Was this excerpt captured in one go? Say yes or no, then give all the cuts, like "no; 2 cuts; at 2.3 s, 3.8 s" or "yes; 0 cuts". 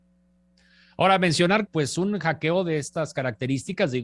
no; 1 cut; at 1.7 s